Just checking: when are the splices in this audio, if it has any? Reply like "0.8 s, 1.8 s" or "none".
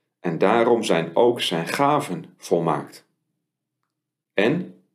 none